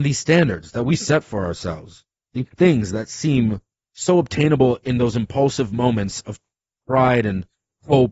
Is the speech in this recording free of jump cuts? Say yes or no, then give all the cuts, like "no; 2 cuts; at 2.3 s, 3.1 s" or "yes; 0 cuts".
yes; 0 cuts